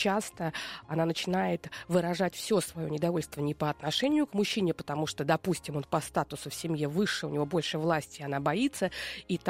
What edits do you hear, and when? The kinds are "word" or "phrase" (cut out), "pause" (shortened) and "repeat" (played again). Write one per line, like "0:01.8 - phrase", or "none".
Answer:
none